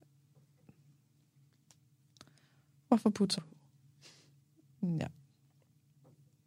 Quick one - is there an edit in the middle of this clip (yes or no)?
yes